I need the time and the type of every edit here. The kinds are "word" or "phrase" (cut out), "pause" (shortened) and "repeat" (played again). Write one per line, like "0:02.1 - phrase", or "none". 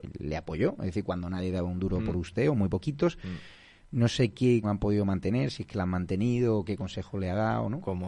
0:04.6 - word